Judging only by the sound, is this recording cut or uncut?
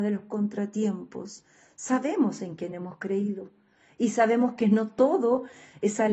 uncut